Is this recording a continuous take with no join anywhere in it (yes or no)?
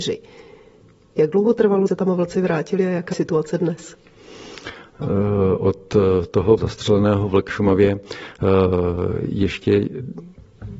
no